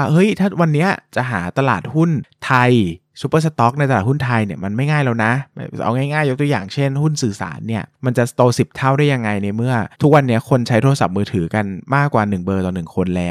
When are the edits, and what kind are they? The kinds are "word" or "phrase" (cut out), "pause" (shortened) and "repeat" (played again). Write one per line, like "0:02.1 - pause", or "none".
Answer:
0:09.9 - pause